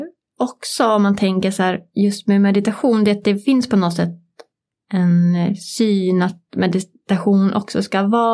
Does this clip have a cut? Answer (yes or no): no